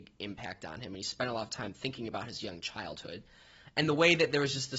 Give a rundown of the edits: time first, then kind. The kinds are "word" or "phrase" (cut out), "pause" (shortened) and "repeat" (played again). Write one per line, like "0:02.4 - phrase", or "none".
none